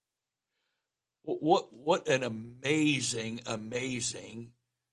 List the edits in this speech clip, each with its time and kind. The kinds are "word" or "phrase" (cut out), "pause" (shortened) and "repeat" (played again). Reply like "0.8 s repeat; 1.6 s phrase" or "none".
none